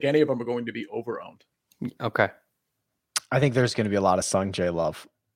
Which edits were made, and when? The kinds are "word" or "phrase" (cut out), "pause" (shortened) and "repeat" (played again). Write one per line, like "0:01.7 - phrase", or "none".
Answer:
none